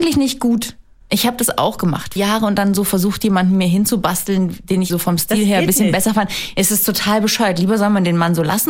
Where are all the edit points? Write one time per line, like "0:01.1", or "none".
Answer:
0:02.2
0:04.9